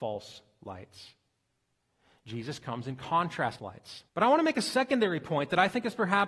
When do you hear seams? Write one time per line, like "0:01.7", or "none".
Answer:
0:03.6
0:04.1